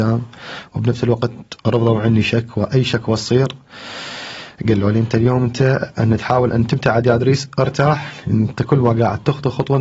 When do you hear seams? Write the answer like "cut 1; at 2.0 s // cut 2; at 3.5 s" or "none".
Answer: none